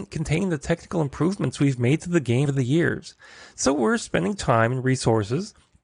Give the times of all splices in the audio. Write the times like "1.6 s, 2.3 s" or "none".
2.5 s

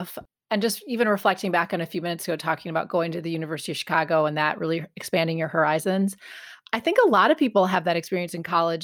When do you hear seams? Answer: none

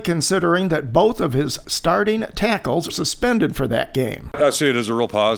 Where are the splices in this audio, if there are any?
2.9 s

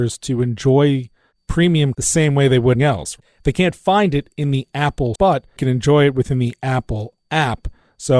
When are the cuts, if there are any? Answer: 1.9 s, 2.7 s, 5.1 s, 5.6 s

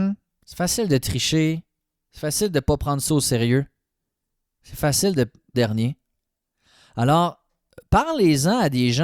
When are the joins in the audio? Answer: 5.5 s

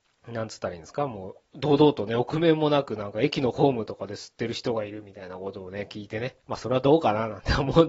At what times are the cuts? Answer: 1.4 s, 6.4 s

